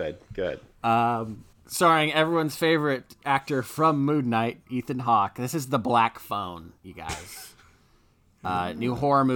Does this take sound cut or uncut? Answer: cut